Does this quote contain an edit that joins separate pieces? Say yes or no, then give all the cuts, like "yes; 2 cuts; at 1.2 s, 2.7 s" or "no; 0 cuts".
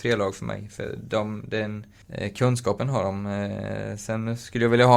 yes; 1 cut; at 2.0 s